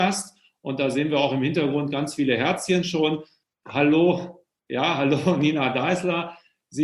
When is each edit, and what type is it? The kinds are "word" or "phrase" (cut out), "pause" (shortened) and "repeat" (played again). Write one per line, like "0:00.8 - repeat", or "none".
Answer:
none